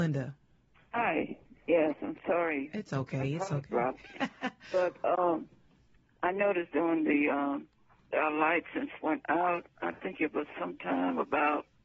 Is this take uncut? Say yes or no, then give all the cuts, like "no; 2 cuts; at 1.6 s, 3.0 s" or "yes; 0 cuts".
no; 2 cuts; at 8.1 s, 9.0 s